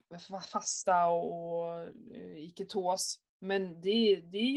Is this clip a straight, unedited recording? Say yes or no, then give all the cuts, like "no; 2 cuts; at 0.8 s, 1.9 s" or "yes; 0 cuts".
no; 1 cut; at 3.3 s